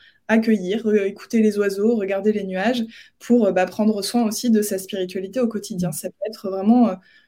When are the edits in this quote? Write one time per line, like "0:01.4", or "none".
none

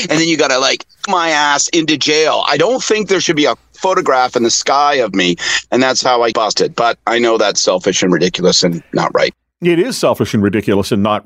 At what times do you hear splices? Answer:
0:01.1
0:06.3

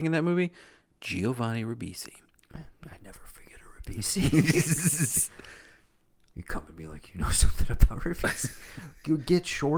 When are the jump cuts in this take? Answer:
none

